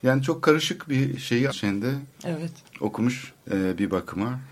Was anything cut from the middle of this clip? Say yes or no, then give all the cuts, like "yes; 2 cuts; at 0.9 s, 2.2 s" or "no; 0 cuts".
yes; 2 cuts; at 1.5 s, 3.4 s